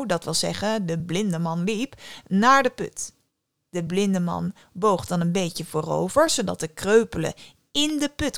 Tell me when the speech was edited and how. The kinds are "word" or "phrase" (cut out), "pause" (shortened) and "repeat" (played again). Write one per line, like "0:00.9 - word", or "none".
none